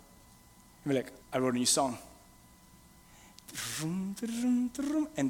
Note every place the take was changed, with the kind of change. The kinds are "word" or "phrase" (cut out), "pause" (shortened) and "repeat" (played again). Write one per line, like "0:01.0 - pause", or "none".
0:01.2 - pause